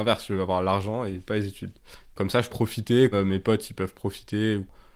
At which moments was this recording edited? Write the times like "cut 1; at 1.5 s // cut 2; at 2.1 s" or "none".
cut 1; at 2.5 s // cut 2; at 3.1 s